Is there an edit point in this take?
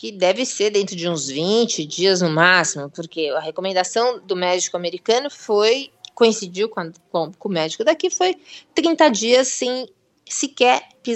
no; 0 cuts

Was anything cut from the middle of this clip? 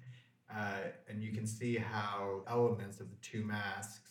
yes; 1 cut; at 2.4 s

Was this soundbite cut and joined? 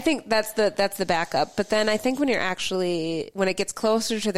no; 0 cuts

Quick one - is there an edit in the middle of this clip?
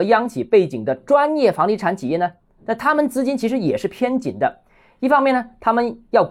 no; 0 cuts

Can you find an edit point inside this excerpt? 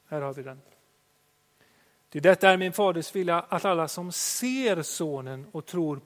no; 0 cuts

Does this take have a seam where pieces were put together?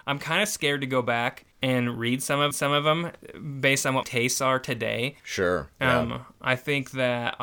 yes; 4 cuts; at 1.5 s, 2.5 s, 4.0 s, 5.2 s

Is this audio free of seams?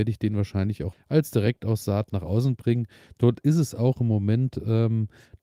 no; 1 cut; at 0.9 s

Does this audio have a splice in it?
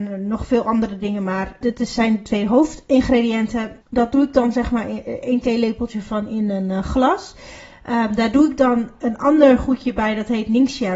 yes; 2 cuts; at 1.6 s, 3.8 s

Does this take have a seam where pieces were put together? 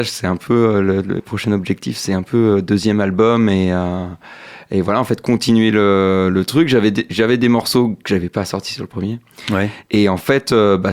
no; 0 cuts

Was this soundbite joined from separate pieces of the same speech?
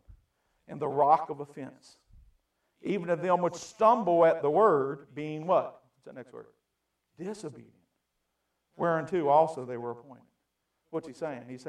no; 0 cuts

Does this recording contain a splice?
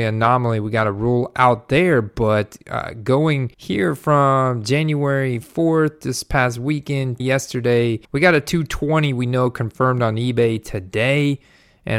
yes; 3 cuts; at 3.5 s, 7.2 s, 8.0 s

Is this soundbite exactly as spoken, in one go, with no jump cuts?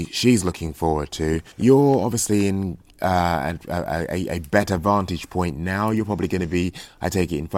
no; 1 cut; at 1.5 s

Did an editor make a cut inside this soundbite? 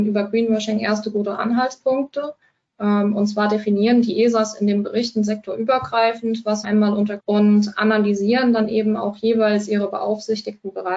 yes; 2 cuts; at 6.6 s, 7.2 s

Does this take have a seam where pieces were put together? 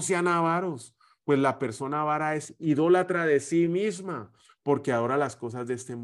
no; 0 cuts

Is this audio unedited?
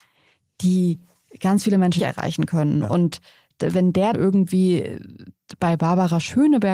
no; 2 cuts; at 2.0 s, 4.1 s

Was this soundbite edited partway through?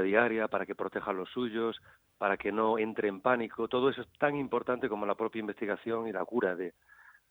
no; 0 cuts

